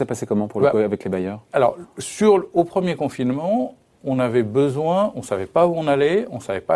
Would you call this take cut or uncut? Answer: uncut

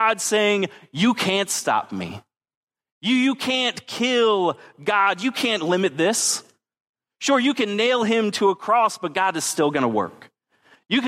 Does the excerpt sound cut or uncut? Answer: uncut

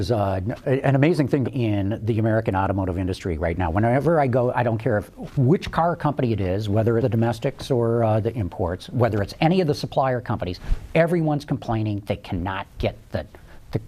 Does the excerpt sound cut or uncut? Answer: cut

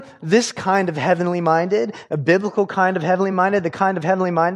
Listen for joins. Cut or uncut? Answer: uncut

